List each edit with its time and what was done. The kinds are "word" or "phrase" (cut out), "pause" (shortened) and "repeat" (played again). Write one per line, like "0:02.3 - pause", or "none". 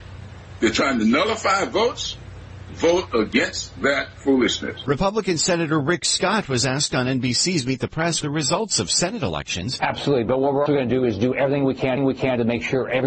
0:08.2 - phrase
0:10.7 - word
0:12.0 - repeat